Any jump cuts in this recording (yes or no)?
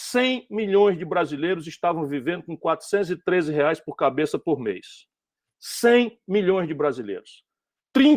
no